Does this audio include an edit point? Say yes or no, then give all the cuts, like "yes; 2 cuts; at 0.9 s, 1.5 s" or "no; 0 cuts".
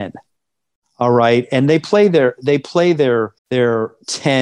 yes; 1 cut; at 3.4 s